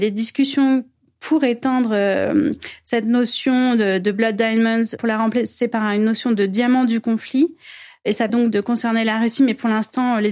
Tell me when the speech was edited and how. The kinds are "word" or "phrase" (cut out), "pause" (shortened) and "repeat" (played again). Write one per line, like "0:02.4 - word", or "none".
0:08.3 - word